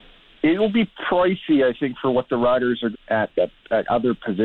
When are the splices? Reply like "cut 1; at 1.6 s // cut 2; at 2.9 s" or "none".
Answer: cut 1; at 2.9 s